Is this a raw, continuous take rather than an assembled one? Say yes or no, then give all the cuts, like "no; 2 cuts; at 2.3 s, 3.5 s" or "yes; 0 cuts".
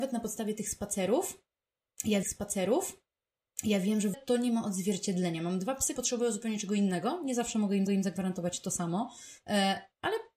no; 4 cuts; at 2.2 s, 4.1 s, 6.0 s, 7.9 s